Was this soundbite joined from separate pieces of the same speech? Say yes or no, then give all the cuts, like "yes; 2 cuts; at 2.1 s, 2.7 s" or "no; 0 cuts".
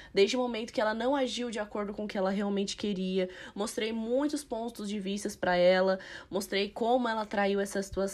no; 0 cuts